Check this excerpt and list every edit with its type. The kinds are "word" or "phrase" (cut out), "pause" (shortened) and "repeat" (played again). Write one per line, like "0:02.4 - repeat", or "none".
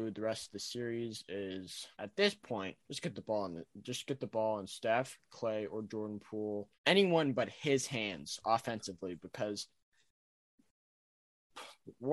0:01.9 - pause
0:02.8 - pause
0:06.7 - pause